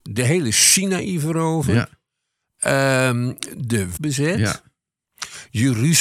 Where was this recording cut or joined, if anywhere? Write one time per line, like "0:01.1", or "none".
0:04.0